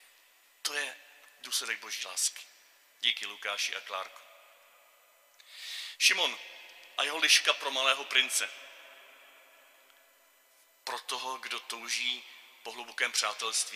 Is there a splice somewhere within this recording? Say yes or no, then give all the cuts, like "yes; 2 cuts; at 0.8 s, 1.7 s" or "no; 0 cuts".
no; 0 cuts